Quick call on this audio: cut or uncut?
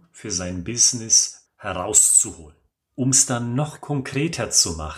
cut